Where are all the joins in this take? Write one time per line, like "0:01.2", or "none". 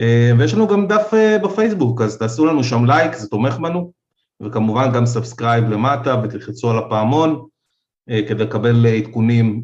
none